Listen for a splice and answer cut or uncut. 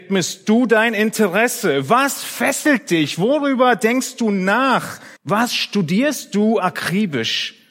cut